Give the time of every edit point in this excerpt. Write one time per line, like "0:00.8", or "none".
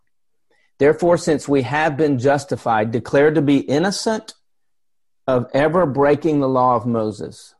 none